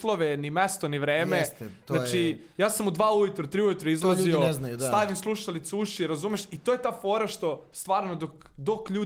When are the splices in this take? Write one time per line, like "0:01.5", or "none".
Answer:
none

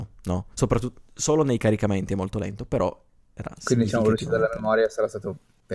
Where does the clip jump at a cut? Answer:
none

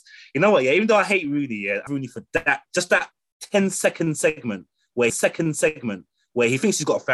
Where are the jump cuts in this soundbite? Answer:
0:01.9
0:05.1

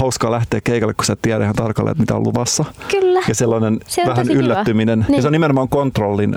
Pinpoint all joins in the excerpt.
none

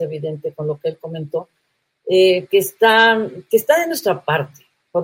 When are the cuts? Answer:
none

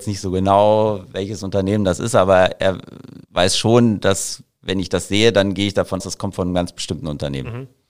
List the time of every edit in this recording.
0:03.2
0:06.0

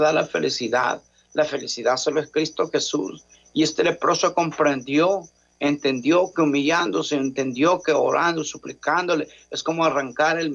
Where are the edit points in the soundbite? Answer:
none

